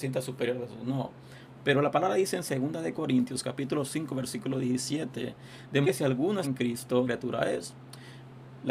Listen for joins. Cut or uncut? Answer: cut